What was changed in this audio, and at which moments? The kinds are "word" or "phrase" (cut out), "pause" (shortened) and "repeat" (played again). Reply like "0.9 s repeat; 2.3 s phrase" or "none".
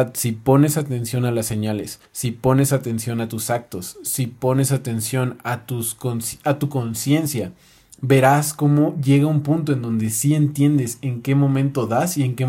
2.1 s pause